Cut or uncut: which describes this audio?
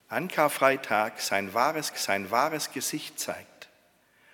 cut